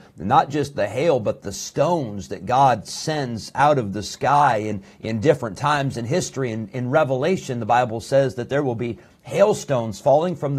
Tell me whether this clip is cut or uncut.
uncut